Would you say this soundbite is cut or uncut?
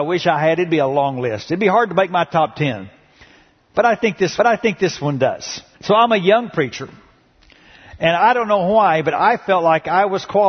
cut